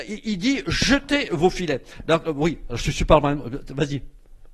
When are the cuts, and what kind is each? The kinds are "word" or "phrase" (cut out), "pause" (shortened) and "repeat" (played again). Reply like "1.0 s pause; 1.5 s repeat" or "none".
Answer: none